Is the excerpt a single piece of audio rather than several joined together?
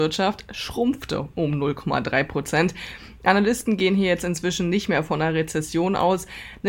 yes; 0 cuts

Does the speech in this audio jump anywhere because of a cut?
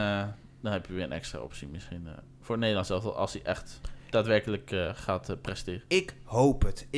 no; 0 cuts

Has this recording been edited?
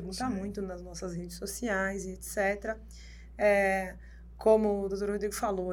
no; 0 cuts

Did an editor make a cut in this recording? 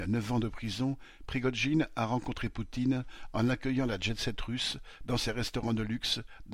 no; 0 cuts

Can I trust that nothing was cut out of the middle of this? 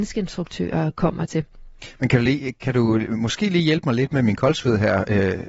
yes; 0 cuts

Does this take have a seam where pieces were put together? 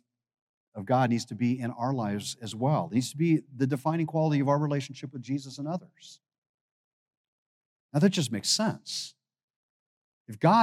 no; 0 cuts

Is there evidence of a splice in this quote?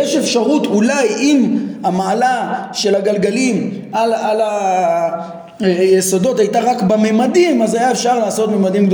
no; 0 cuts

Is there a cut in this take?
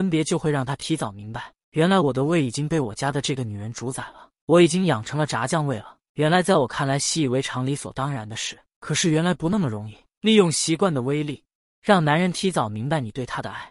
no; 0 cuts

